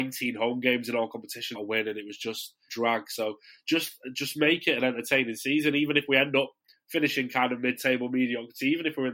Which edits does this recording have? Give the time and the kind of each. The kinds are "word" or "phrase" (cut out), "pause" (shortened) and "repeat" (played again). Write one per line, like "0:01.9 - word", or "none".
0:01.5 - word
0:02.7 - phrase